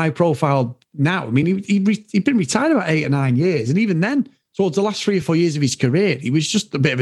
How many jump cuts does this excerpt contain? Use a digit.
0